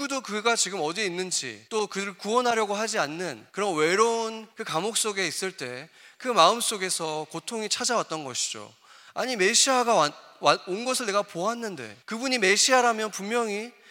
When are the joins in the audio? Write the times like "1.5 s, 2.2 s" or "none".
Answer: 1.7 s, 3.5 s, 4.5 s, 12.0 s